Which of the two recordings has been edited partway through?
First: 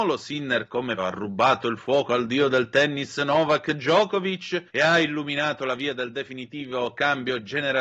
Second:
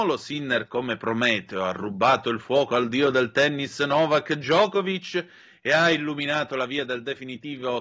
first; 2 cuts; at 1.0 s, 4.7 s

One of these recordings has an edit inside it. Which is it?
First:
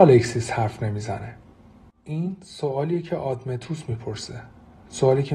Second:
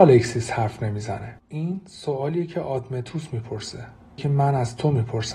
second; 2 cuts; at 1.4 s, 4.2 s

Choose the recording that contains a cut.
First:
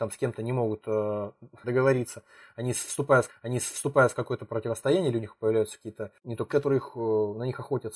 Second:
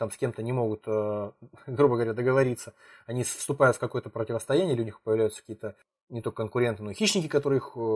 first; 4 cuts; at 1.6 s, 3.3 s, 6.2 s, 6.5 s

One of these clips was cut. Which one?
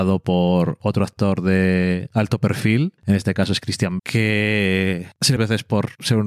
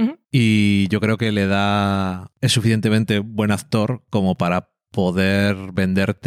first; 2 cuts; at 4.0 s, 5.4 s

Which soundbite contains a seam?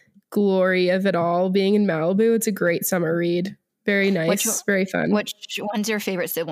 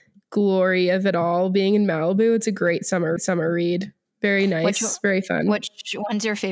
second; 1 cut; at 3.2 s

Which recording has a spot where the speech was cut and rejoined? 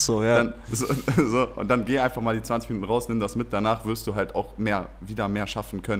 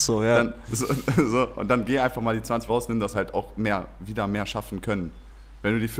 second; 2 cuts; at 2.7 s, 3.1 s

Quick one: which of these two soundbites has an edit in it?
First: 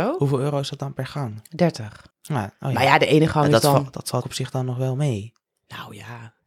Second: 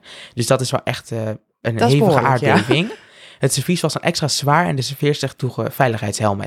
first; 2 cuts; at 2.1 s, 4.2 s

